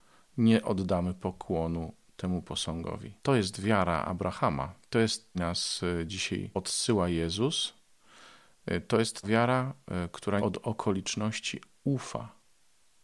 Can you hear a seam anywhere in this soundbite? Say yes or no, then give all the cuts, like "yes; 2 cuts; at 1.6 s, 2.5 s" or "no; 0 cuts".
yes; 5 cuts; at 3.2 s, 4.8 s, 5.3 s, 9.2 s, 10.4 s